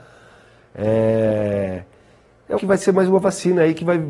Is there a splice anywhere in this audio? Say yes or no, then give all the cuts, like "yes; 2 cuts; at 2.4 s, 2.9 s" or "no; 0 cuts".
yes; 1 cut; at 2.6 s